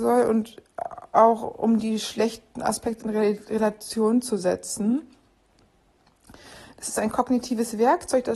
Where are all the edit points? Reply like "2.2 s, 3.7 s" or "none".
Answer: none